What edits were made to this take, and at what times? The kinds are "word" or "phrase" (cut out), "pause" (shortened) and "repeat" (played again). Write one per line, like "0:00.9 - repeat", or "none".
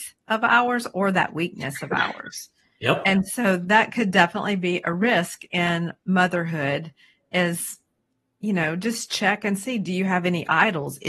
none